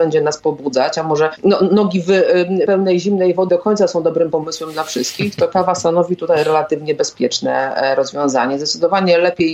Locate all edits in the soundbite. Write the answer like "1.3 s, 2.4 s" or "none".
2.7 s, 3.5 s